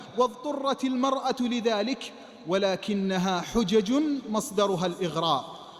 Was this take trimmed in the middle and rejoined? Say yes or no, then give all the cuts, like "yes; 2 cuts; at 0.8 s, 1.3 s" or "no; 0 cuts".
no; 0 cuts